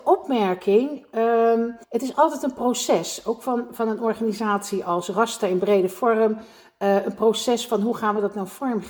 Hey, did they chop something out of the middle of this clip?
yes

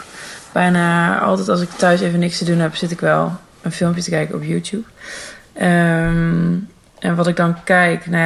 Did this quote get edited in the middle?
no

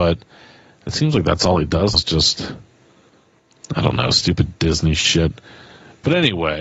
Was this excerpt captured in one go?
no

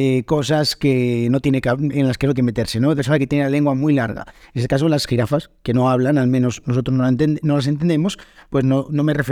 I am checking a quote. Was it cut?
yes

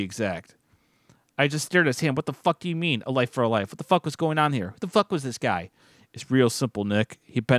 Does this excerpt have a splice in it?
no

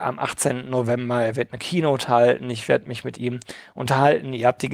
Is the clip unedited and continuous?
yes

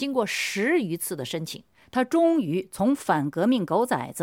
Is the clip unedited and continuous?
yes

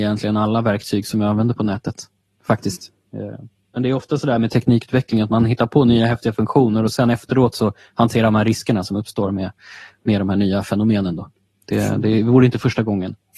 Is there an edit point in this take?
no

